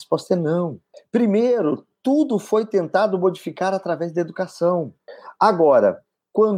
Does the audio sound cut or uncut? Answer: uncut